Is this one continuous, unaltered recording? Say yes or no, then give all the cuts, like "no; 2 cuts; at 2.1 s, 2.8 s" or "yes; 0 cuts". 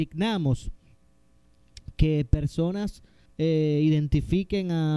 no; 1 cut; at 3.3 s